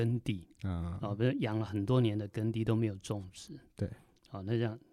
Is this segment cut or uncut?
uncut